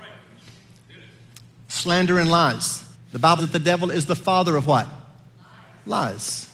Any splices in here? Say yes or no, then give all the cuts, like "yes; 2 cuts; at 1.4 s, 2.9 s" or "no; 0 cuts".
yes; 2 cuts; at 2.9 s, 3.4 s